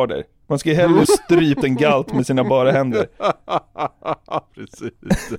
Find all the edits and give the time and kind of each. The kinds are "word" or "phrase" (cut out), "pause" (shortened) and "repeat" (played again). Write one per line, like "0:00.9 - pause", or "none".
0:01.0 - word
0:01.6 - word